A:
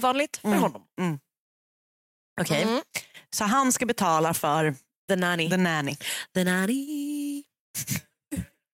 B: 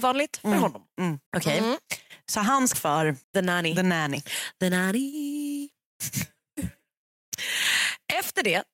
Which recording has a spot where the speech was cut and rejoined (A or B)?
B